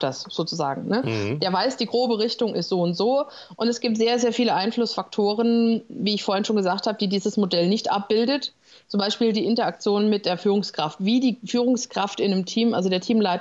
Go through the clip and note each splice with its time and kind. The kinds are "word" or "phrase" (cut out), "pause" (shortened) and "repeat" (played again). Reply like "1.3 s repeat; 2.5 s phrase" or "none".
none

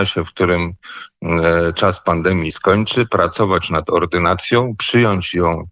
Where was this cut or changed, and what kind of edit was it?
2.5 s word

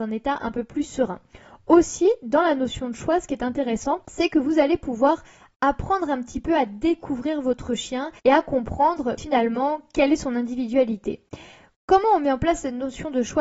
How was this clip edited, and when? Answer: 8.2 s pause; 9.2 s word

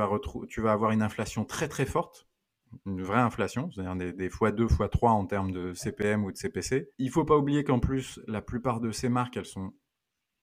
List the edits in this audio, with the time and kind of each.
6.9 s pause

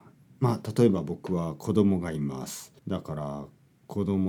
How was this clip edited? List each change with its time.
2.8 s pause

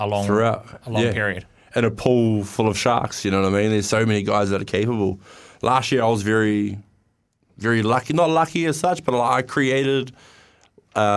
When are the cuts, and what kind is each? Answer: none

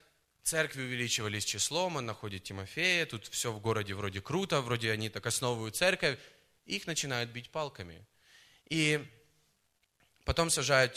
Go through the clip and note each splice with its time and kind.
none

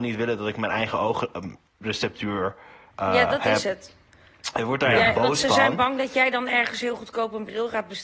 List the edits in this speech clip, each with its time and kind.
none

